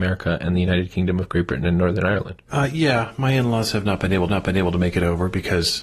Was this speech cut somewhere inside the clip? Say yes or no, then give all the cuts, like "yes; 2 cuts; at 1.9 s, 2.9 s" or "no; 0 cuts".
yes; 2 cuts; at 2.5 s, 4.3 s